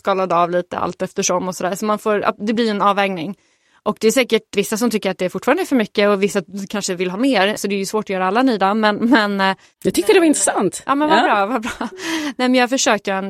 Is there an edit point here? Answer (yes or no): no